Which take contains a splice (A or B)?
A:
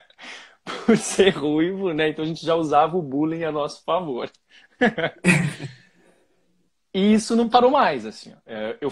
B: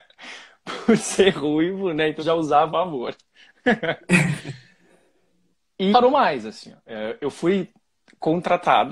B